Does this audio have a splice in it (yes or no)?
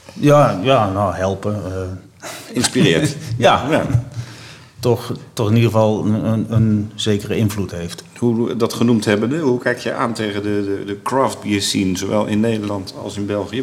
no